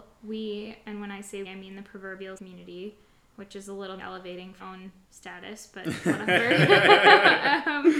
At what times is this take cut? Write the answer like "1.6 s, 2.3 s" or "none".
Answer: 1.5 s, 2.4 s, 3.3 s, 4.0 s, 4.6 s, 5.0 s